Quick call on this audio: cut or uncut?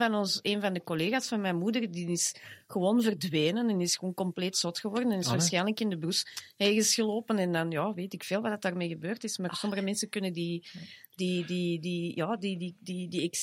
uncut